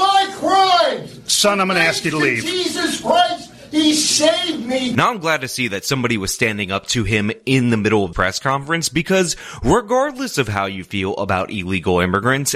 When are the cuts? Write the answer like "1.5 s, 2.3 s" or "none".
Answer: 8.1 s